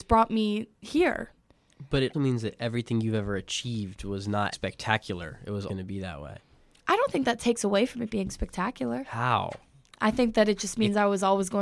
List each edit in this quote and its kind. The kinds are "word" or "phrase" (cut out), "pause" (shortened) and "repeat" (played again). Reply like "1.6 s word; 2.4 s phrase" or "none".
2.1 s word; 4.5 s word; 5.7 s word